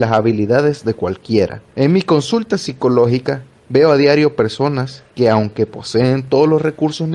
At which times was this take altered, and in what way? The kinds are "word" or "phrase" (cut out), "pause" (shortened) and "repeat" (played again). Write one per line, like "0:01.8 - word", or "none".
0:01.7 - pause